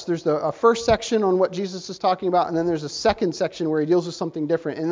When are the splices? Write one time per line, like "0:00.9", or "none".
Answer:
none